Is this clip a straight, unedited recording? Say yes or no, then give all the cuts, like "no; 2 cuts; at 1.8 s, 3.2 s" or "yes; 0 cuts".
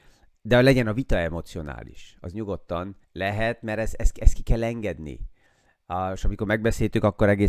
no; 1 cut; at 3.0 s